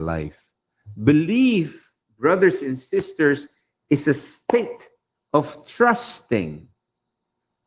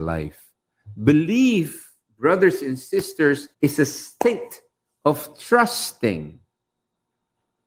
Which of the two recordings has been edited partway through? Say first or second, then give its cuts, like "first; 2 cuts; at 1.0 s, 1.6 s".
second; 1 cut; at 3.5 s